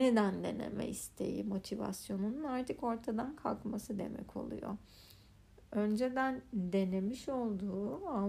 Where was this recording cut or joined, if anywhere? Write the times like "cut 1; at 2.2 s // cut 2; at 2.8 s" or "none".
none